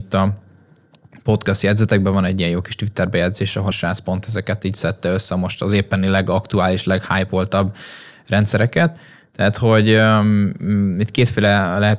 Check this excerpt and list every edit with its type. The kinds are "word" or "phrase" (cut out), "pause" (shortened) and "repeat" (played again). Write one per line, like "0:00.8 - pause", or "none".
0:03.7 - word